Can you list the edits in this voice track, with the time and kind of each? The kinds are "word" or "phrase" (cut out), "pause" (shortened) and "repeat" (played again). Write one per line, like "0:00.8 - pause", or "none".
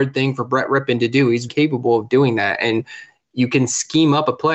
0:01.5 - word